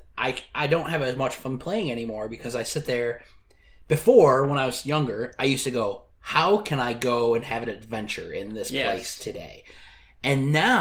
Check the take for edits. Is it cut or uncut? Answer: uncut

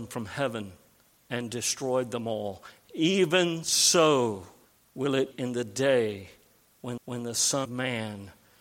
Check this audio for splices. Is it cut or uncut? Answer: cut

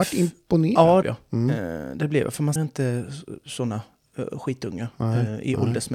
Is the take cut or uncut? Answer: cut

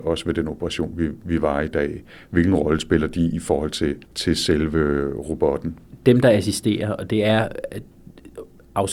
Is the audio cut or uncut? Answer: cut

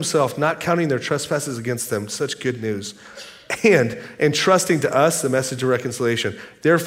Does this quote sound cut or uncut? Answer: uncut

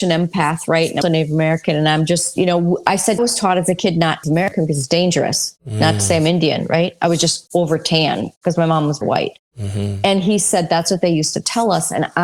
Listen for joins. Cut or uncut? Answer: cut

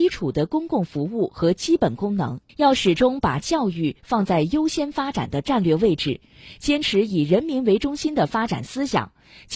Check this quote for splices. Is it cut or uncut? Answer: cut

